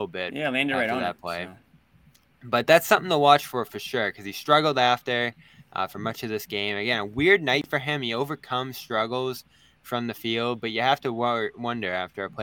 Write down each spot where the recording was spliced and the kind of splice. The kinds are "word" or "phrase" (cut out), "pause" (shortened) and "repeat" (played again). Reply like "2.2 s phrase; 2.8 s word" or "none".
none